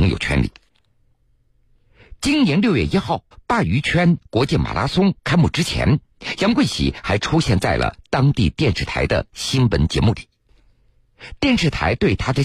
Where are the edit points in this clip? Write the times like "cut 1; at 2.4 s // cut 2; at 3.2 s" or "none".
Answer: cut 1; at 3.3 s